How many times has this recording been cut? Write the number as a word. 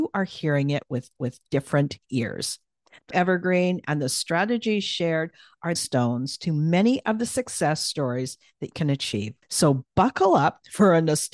five